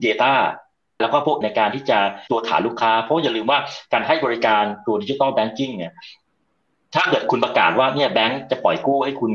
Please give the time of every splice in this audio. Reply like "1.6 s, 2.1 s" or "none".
1.0 s, 1.4 s, 2.3 s